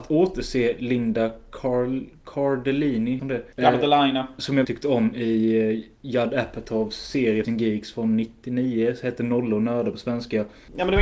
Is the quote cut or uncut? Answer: cut